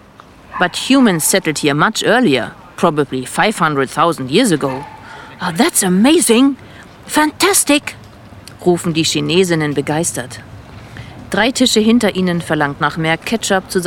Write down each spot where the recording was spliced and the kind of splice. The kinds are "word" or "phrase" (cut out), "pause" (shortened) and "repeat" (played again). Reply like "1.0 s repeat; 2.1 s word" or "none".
12.8 s word